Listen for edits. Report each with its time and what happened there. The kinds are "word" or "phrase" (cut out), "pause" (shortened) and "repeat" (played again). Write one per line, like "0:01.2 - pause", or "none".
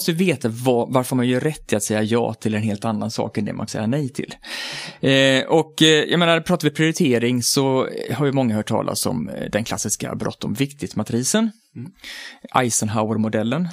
0:03.7 - phrase